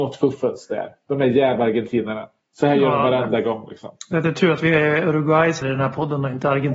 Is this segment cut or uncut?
cut